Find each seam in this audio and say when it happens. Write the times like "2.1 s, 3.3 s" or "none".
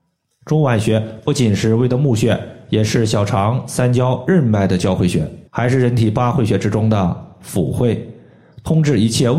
5.5 s